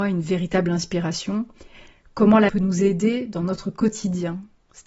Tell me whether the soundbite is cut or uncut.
cut